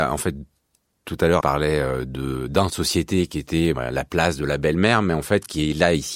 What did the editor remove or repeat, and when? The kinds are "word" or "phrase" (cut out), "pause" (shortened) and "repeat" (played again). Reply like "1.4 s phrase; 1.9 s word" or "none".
1.4 s word; 2.7 s word; 3.7 s word